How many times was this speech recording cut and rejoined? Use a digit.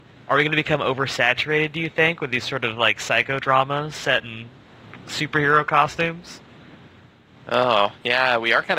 0